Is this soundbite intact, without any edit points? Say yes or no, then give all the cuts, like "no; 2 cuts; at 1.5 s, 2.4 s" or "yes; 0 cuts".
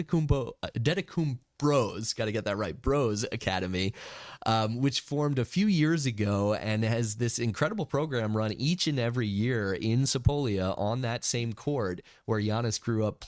yes; 0 cuts